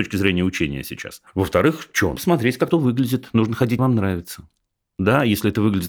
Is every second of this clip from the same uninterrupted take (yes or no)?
no